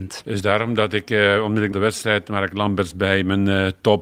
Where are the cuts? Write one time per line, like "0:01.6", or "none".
0:01.7